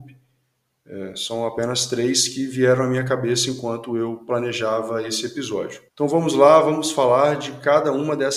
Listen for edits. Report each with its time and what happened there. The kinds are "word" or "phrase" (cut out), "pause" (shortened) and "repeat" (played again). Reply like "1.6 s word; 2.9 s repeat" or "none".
5.9 s pause